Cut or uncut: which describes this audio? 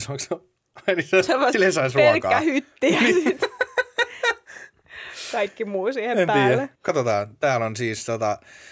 cut